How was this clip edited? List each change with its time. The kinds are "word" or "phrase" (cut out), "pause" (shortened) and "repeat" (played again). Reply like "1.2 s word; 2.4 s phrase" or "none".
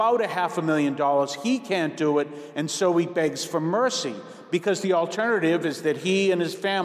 none